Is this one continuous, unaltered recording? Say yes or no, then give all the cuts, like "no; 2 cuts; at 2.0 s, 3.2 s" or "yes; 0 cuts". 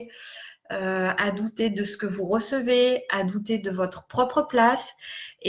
yes; 0 cuts